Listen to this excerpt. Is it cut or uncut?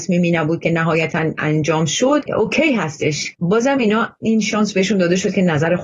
uncut